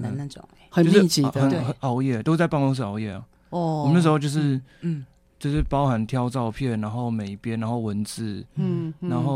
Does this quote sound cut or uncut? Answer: uncut